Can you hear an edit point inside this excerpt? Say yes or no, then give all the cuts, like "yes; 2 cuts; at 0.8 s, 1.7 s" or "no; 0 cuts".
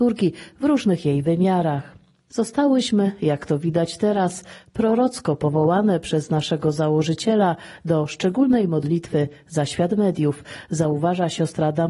no; 0 cuts